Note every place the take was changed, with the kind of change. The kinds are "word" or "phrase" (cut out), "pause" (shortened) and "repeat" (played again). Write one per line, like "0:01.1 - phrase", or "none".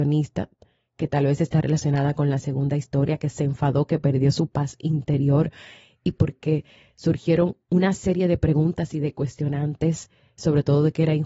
none